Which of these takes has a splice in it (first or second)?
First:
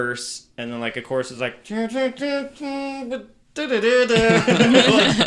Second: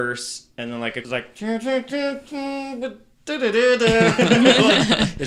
second